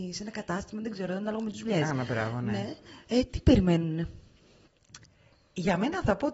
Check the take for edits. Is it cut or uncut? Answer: uncut